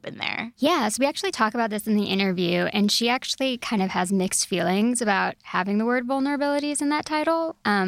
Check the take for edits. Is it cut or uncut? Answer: uncut